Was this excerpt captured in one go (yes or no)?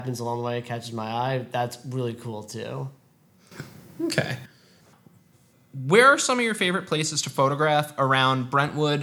yes